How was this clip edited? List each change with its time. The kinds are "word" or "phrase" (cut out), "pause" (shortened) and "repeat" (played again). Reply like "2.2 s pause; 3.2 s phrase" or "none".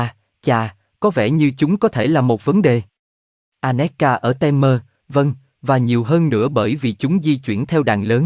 none